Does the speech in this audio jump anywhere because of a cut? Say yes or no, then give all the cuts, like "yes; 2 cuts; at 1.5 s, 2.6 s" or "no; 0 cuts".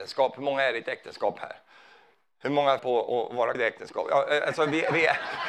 yes; 2 cuts; at 2.8 s, 3.5 s